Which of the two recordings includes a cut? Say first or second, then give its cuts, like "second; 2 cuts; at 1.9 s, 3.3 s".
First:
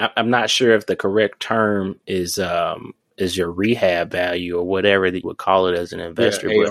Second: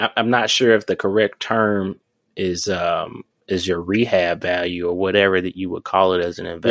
first; 2 cuts; at 2.0 s, 5.2 s